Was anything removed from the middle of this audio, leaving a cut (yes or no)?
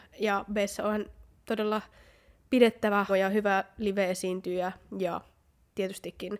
yes